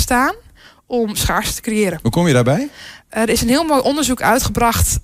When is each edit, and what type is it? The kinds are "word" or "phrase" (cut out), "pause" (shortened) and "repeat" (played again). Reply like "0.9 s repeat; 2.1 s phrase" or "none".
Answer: none